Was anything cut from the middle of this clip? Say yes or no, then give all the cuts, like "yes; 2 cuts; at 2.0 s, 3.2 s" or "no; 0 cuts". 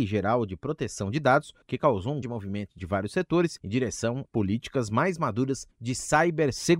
yes; 5 cuts; at 1.6 s, 2.2 s, 2.8 s, 4.2 s, 5.7 s